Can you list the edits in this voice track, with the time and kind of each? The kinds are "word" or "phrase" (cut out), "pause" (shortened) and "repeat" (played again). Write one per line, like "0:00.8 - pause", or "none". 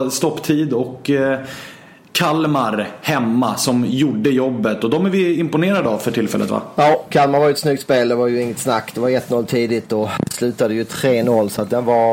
none